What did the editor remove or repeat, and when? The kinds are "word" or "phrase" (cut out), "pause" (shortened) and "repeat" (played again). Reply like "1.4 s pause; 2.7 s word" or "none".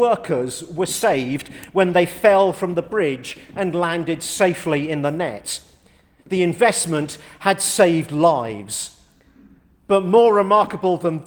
none